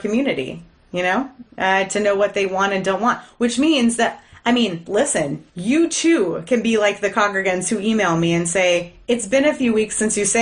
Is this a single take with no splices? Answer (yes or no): no